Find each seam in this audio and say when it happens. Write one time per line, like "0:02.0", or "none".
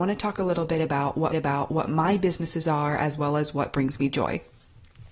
0:01.3